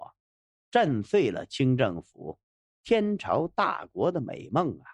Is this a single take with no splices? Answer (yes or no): yes